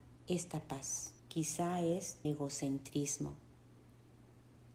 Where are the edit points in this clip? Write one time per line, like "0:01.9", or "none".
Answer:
0:01.2
0:02.2